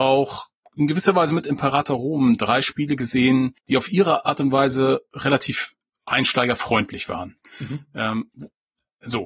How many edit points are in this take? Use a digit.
1